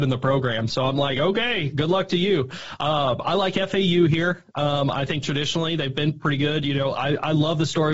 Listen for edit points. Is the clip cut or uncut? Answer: uncut